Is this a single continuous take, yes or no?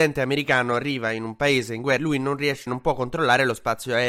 no